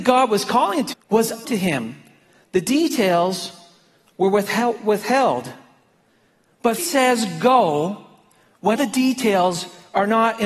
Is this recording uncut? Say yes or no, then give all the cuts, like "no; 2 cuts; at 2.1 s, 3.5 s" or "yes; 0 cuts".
no; 4 cuts; at 0.9 s, 1.4 s, 6.8 s, 8.8 s